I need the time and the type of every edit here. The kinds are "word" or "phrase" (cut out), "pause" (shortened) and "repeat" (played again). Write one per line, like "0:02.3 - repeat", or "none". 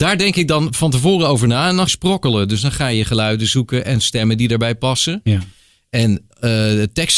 0:01.9 - phrase